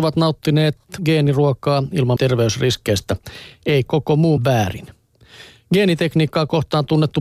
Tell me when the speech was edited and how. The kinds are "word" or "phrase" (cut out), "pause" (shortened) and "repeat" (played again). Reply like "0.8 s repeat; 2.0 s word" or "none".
1.0 s word; 2.2 s phrase; 3.9 s word; 4.4 s phrase